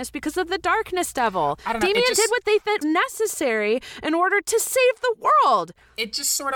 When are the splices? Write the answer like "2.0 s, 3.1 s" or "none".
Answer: 2.8 s